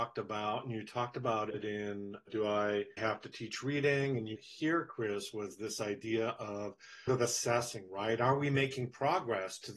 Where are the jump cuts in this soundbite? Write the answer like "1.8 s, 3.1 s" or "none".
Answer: 3.0 s, 4.4 s, 7.1 s

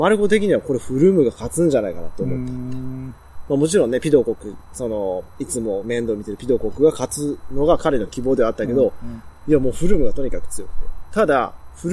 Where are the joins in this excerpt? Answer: 5.3 s

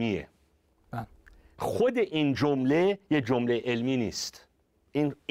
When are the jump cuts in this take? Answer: none

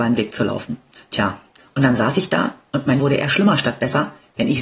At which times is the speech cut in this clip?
3.0 s

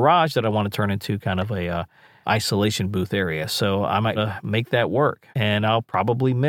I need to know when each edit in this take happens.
2.2 s, 4.2 s, 5.3 s

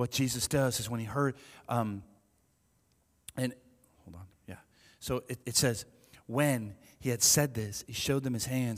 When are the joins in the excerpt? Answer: 5.4 s

